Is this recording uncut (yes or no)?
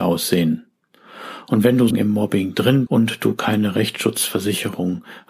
no